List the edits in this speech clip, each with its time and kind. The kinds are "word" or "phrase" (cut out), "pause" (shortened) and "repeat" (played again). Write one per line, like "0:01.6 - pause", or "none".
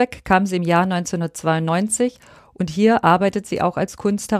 none